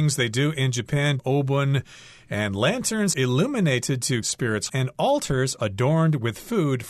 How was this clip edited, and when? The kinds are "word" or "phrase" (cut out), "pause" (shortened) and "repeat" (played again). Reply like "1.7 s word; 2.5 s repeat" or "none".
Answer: 1.2 s word; 3.1 s word; 4.2 s word; 4.7 s word; 5.6 s word